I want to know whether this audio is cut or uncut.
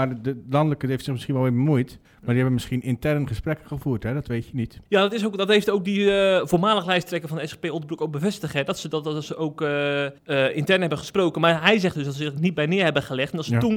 cut